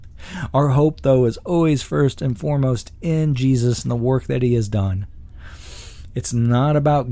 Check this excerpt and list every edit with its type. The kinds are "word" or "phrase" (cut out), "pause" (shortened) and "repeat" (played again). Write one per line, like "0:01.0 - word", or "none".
none

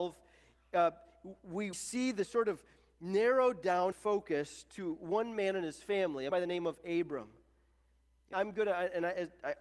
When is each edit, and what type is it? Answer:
0:01.7 - word
0:02.2 - word
0:03.9 - word
0:06.3 - word
0:08.3 - word

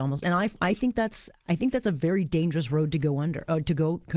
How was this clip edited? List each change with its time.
none

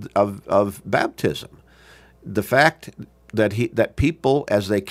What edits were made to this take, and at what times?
none

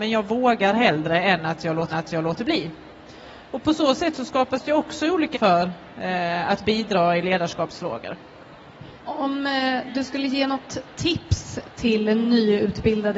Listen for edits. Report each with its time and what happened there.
0:01.9 - repeat
0:05.3 - word
0:09.0 - pause

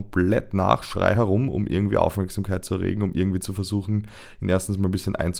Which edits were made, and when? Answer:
none

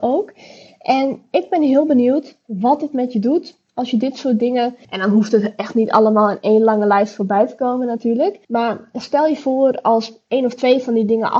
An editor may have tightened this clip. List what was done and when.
0:04.8 - pause
0:08.4 - pause

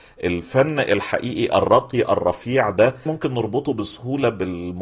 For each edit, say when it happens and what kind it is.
0:03.1 - word

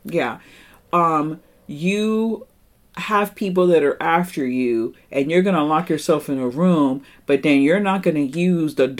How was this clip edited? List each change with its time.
none

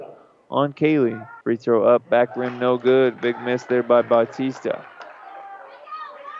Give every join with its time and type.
0:01.4 - pause

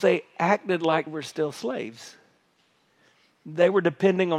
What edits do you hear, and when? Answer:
0:01.1 - word

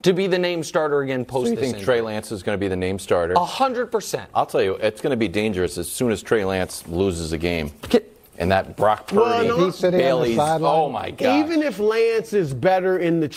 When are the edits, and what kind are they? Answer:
none

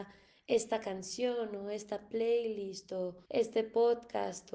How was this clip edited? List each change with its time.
0:03.3 - pause

